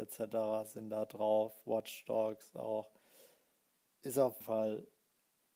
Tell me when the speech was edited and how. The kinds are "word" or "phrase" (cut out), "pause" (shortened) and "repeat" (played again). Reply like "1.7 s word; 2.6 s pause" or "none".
4.4 s word